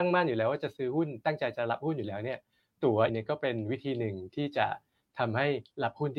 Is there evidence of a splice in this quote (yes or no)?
yes